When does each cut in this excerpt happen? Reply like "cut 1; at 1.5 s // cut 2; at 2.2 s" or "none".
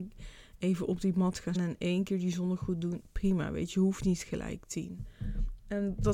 cut 1; at 1.5 s